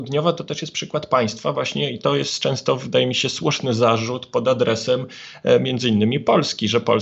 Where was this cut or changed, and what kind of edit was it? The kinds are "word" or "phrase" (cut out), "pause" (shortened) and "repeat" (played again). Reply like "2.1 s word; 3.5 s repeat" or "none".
none